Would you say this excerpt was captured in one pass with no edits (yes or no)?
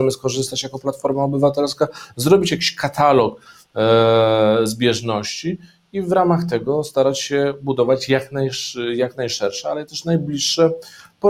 yes